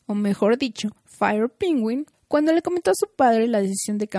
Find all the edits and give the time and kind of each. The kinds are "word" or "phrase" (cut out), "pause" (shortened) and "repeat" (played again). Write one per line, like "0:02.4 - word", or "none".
0:01.0 - pause
0:02.1 - pause